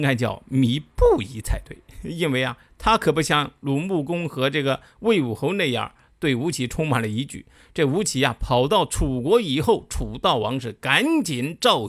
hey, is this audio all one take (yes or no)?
yes